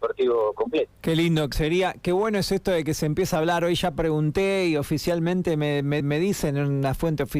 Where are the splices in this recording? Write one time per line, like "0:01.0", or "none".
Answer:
0:01.0
0:01.5
0:06.0